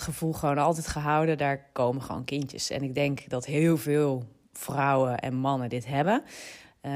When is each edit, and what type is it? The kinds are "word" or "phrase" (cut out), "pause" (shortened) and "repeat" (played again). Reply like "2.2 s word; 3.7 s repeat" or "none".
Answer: none